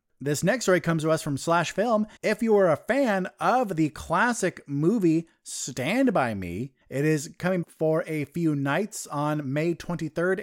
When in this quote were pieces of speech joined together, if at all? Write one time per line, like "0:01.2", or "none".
0:02.2
0:06.8
0:07.6